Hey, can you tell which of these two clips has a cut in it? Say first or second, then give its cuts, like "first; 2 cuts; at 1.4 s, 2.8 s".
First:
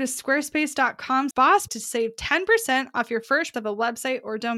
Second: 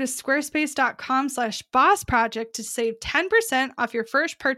first; 3 cuts; at 1.3 s, 1.7 s, 3.5 s